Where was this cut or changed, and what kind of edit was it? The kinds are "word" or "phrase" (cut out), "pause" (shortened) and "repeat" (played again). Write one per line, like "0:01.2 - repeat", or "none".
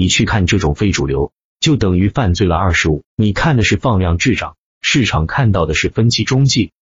0:03.1 - pause